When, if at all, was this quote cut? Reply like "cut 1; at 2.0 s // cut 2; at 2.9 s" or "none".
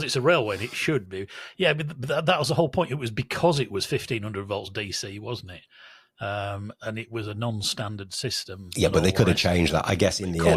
none

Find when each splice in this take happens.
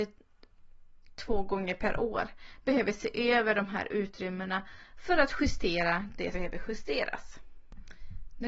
cut 1; at 6.3 s

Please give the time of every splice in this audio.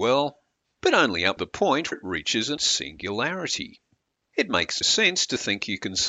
cut 1; at 1.4 s // cut 2; at 1.9 s // cut 3; at 2.6 s // cut 4; at 4.8 s

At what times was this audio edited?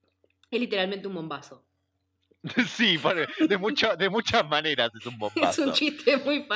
none

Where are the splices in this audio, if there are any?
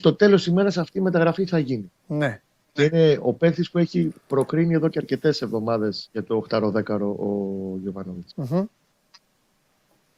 cut 1; at 2.0 s // cut 2; at 6.1 s // cut 3; at 8.3 s

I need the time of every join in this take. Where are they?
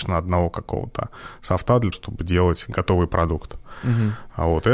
cut 1; at 1.9 s

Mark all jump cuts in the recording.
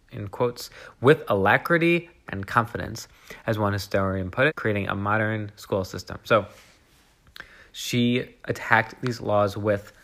cut 1; at 2.3 s // cut 2; at 4.5 s

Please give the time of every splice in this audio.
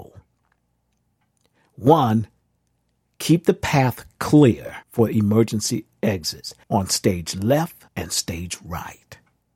cut 1; at 4.8 s // cut 2; at 6.6 s // cut 3; at 7.9 s

